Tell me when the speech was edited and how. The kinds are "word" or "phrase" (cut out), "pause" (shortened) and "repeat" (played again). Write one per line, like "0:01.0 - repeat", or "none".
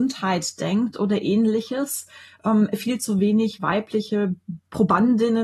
none